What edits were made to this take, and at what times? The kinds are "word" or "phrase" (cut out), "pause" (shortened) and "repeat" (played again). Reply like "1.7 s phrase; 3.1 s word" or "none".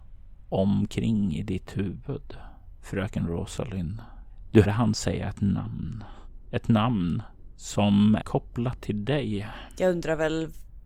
4.6 s word; 8.2 s word